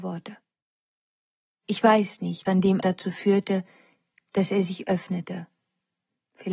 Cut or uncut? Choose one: cut